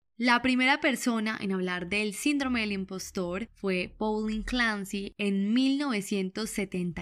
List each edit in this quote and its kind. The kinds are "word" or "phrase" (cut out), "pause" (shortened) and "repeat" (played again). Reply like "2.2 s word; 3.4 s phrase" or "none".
none